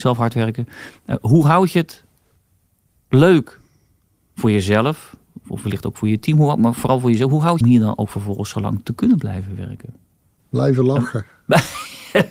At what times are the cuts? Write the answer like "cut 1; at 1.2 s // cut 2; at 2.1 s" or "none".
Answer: cut 1; at 7.6 s